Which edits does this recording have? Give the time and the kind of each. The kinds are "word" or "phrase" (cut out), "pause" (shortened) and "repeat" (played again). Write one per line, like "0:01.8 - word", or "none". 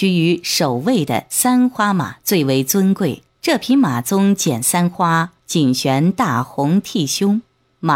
0:03.3 - pause
0:05.4 - pause